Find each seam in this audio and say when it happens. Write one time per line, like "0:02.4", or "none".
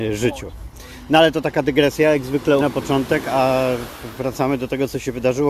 0:02.6